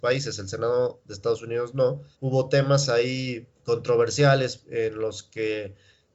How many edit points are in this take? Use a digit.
2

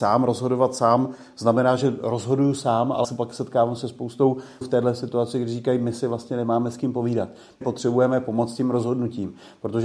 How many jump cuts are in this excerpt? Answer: 3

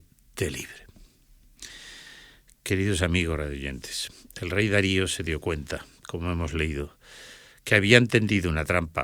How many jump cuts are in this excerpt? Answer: 0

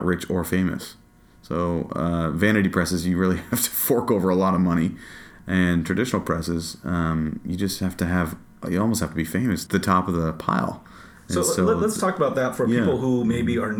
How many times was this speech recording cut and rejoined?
1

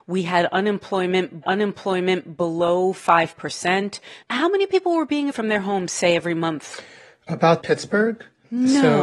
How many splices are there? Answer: 3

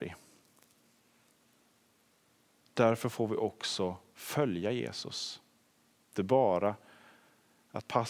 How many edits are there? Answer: 1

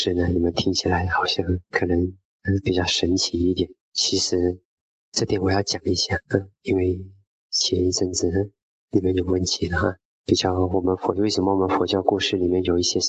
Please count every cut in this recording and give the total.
1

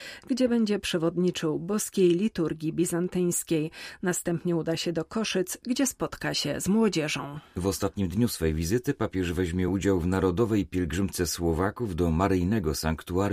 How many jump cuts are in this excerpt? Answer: 0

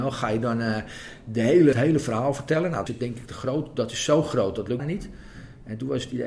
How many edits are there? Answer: 3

